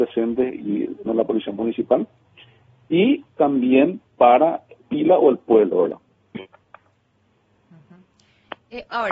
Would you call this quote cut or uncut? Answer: cut